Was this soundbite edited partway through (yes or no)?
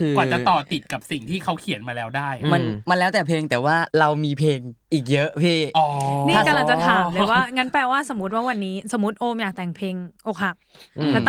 yes